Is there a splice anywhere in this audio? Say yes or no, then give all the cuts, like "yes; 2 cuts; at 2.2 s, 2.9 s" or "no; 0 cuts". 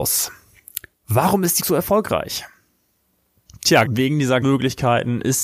yes; 3 cuts; at 1.6 s, 3.8 s, 4.4 s